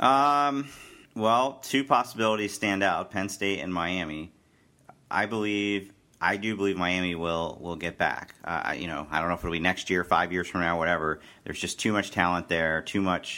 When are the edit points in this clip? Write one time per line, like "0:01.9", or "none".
0:01.0